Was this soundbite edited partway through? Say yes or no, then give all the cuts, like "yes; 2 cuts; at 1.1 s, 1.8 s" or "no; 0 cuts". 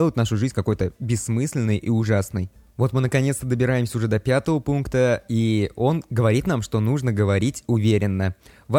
yes; 1 cut; at 2.6 s